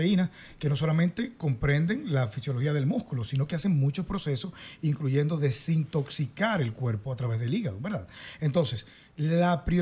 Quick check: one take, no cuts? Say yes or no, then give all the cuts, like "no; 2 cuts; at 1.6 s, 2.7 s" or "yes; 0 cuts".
yes; 0 cuts